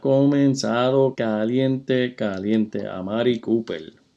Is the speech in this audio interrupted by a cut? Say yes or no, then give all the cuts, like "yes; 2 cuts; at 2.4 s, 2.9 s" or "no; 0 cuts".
yes; 1 cut; at 1.1 s